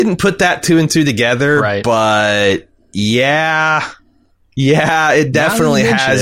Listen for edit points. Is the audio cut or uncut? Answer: uncut